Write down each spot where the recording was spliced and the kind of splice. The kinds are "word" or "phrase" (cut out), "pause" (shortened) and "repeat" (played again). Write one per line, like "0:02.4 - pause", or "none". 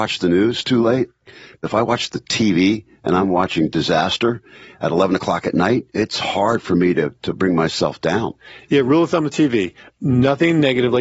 none